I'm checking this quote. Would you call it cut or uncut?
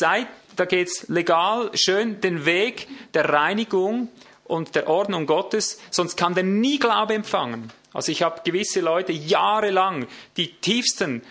uncut